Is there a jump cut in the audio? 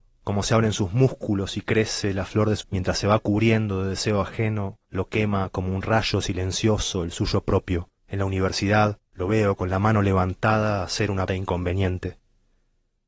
yes; 5 cuts; at 2.6 s, 4.8 s, 8.0 s, 9.1 s, 11.3 s

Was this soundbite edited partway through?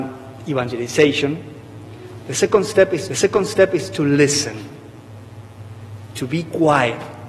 yes; 1 cut; at 3.1 s

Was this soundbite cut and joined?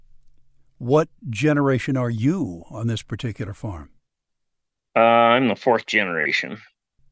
no; 0 cuts

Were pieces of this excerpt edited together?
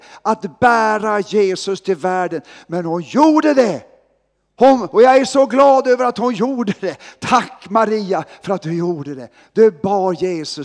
no; 0 cuts

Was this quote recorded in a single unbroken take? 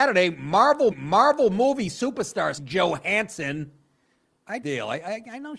no; 3 cuts; at 0.9 s, 2.6 s, 4.6 s

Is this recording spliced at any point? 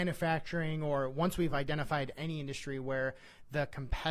no; 0 cuts

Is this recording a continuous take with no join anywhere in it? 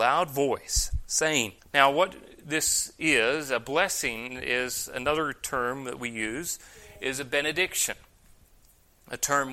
no; 1 cut; at 1.6 s

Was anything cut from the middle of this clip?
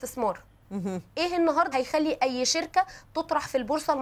yes; 1 cut; at 1.7 s

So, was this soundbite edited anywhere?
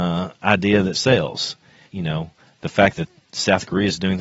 yes; 2 cuts; at 0.9 s, 1.9 s

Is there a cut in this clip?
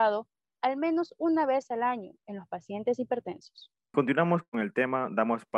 no; 0 cuts

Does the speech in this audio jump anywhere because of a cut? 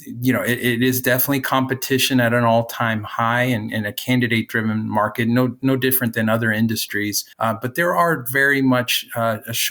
yes; 1 cut; at 7.3 s

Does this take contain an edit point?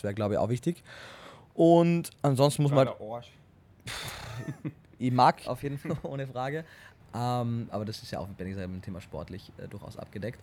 yes; 3 cuts; at 2.2 s, 5.4 s, 5.8 s

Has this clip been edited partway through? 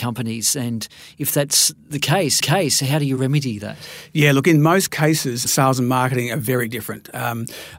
yes; 2 cuts; at 2.4 s, 5.5 s

